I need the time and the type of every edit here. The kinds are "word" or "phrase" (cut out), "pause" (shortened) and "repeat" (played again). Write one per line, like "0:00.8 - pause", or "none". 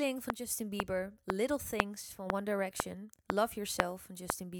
none